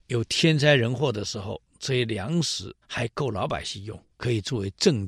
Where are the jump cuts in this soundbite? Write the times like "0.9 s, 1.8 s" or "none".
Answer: 2.8 s, 4.1 s